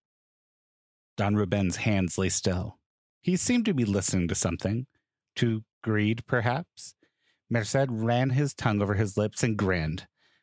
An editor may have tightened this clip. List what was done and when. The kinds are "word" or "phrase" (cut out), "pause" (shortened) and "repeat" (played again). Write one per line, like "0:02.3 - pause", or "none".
none